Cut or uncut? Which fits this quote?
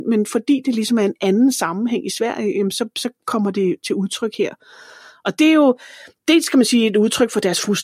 uncut